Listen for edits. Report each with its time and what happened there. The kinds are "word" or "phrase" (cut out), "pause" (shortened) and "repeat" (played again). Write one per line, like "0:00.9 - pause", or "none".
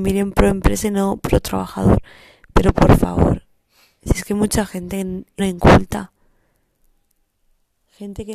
0:05.4 - word